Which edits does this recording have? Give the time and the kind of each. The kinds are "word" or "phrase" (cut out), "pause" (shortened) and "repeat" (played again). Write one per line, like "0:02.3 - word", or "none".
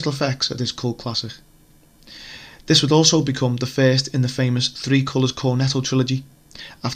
none